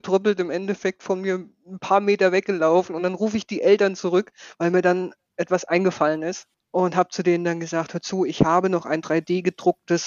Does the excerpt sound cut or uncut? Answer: uncut